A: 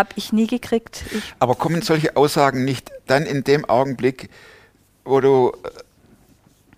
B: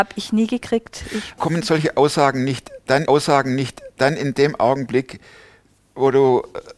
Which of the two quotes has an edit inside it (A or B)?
B